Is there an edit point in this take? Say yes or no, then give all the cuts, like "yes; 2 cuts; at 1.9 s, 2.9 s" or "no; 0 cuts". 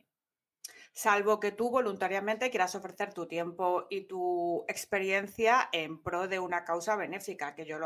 no; 0 cuts